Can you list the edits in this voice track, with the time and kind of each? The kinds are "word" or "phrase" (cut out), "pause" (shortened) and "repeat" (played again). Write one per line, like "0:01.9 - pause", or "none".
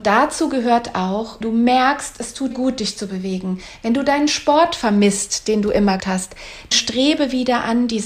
0:01.4 - word
0:02.5 - word
0:06.0 - word
0:06.7 - word